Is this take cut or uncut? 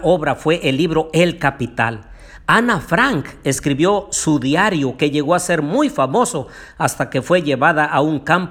uncut